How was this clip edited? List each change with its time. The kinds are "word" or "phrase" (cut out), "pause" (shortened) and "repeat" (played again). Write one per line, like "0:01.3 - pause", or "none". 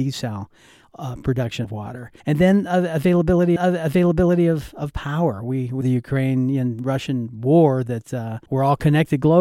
0:01.6 - word
0:02.2 - pause
0:03.6 - repeat
0:05.8 - phrase
0:08.5 - pause